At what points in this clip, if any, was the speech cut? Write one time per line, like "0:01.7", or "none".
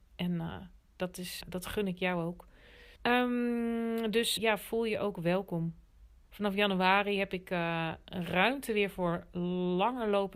0:01.4
0:03.0
0:04.4
0:06.2